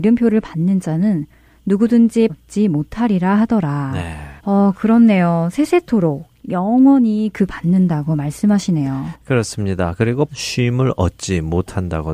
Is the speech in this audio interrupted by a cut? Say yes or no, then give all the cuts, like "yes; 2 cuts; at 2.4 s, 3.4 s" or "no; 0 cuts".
yes; 4 cuts; at 2.3 s, 4.4 s, 7.5 s, 10.3 s